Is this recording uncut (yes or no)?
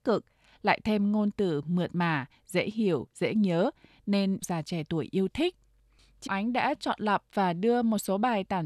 no